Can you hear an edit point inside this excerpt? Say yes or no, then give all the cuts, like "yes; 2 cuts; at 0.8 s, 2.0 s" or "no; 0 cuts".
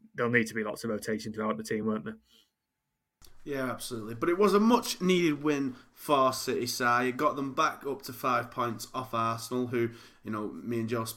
no; 0 cuts